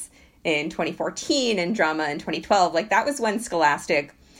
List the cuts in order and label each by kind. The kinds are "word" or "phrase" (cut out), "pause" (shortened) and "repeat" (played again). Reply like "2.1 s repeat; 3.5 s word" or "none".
none